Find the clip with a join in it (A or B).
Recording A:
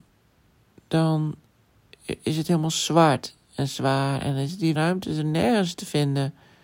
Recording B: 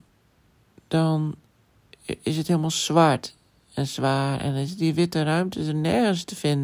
A